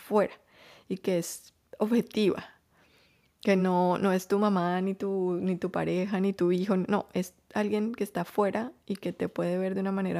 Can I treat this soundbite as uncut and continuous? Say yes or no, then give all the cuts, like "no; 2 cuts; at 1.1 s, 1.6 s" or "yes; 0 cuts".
yes; 0 cuts